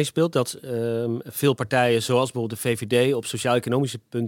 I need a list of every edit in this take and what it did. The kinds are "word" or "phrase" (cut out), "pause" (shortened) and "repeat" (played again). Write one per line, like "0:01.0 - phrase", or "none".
none